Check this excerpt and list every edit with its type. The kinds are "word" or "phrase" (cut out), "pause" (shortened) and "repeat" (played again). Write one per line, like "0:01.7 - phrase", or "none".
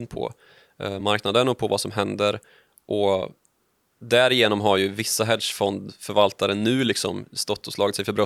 none